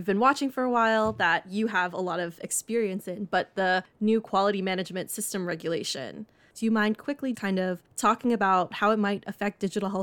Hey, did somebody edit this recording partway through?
yes; 1 cut; at 7.3 s

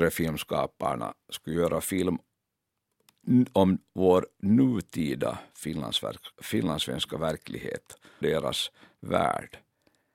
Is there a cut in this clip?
yes; 2 cuts; at 6.3 s, 8.2 s

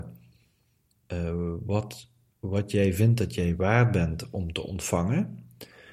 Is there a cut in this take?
no; 0 cuts

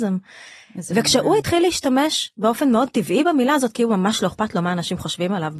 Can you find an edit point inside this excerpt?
no; 0 cuts

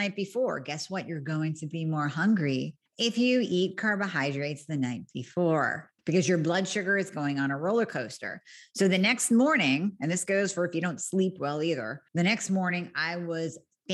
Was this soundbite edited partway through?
yes; 3 cuts; at 2.9 s, 6.0 s, 12.1 s

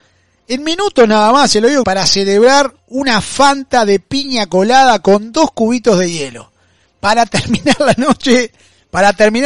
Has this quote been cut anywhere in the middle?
yes; 1 cut; at 1.8 s

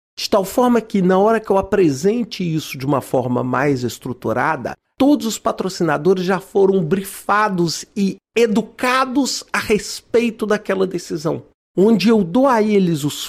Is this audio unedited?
yes; 0 cuts

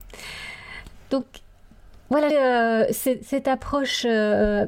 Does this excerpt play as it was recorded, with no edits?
no; 1 cut; at 2.3 s

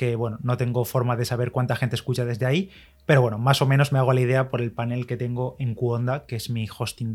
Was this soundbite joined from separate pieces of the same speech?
no; 0 cuts

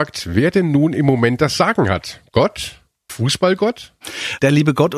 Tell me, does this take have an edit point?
yes; 1 cut; at 3.1 s

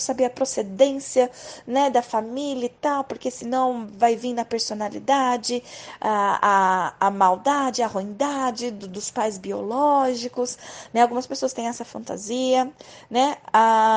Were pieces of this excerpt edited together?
no; 0 cuts

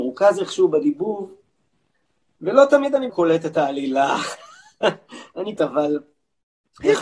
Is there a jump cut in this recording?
yes; 2 cuts; at 3.1 s, 5.6 s

